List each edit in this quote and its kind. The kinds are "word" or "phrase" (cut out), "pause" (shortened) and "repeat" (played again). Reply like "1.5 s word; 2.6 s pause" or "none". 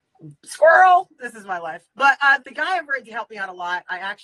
1.9 s pause; 2.4 s word; 3.1 s word

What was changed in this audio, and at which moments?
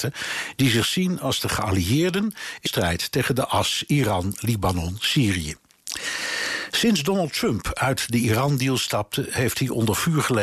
2.7 s word

